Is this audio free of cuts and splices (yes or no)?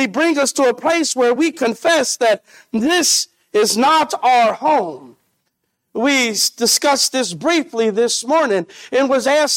yes